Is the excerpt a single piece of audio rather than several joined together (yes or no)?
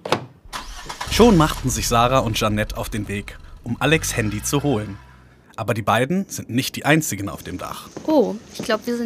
yes